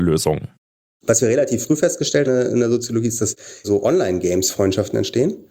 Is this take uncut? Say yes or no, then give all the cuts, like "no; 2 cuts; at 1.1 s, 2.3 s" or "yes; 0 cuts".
no; 2 cuts; at 2.2 s, 3.6 s